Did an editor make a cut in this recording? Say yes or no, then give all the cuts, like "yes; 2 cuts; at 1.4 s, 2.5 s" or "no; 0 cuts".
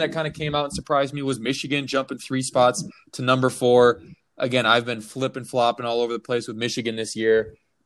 no; 0 cuts